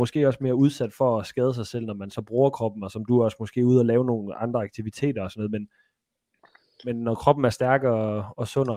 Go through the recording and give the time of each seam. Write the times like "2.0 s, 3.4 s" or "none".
none